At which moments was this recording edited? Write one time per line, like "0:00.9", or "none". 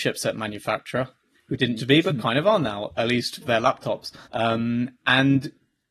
0:01.3
0:01.8
0:03.0
0:03.4
0:04.2